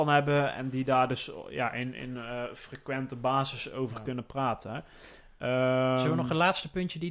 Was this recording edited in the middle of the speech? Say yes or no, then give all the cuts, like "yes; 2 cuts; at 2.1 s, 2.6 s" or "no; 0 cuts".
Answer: no; 0 cuts